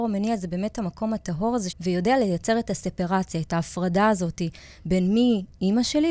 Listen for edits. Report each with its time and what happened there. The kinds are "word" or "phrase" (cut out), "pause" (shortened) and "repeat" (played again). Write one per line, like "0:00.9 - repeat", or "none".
0:01.7 - word